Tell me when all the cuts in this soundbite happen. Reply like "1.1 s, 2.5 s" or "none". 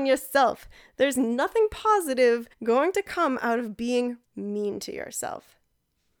2.5 s, 4.2 s